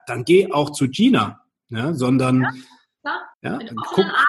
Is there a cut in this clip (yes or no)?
yes